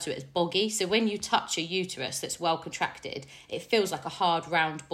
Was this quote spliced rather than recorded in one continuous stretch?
no; 0 cuts

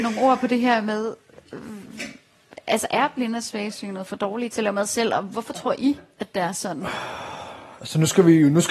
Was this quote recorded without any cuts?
yes; 0 cuts

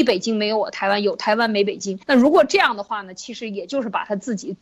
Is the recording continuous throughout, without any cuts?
no; 1 cut; at 2.0 s

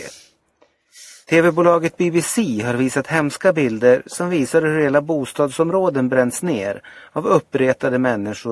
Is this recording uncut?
yes; 0 cuts

